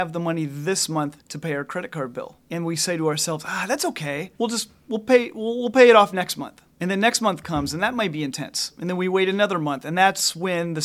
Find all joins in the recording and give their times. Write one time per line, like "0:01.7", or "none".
0:01.2
0:02.4
0:04.4
0:06.7